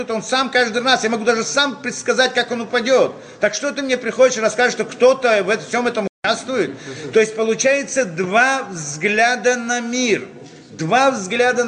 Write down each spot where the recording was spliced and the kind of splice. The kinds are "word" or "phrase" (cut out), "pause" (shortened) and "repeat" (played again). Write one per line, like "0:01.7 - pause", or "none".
none